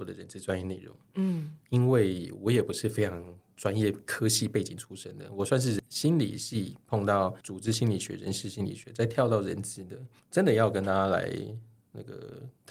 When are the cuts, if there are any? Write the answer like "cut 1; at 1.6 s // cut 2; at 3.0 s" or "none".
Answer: cut 1; at 1.6 s // cut 2; at 7.4 s // cut 3; at 10.2 s